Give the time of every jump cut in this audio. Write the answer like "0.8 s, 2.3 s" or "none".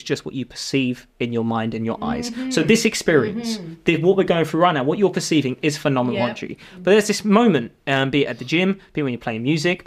none